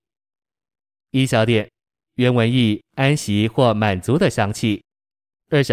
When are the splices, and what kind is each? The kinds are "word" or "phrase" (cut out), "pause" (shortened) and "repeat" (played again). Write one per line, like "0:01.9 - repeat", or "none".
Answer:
0:02.1 - phrase